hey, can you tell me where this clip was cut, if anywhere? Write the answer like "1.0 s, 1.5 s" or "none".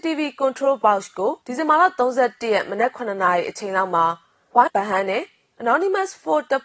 1.4 s, 4.7 s